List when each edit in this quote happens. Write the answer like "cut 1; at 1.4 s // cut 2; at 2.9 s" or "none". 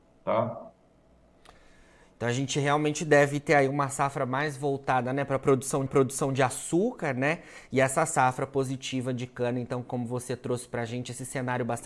cut 1; at 5.9 s